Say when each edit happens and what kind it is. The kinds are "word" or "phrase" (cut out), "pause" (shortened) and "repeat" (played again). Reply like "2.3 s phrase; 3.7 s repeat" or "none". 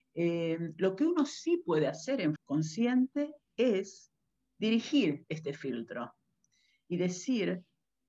2.4 s word